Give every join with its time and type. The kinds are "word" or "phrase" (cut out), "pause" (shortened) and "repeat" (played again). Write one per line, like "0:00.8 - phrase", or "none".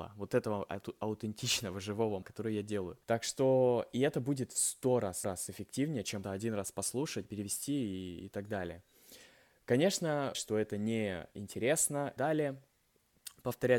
0:02.2 - word
0:03.0 - pause
0:05.2 - repeat
0:06.2 - word
0:07.2 - phrase
0:10.3 - phrase
0:12.2 - phrase